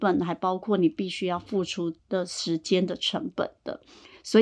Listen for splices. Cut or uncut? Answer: cut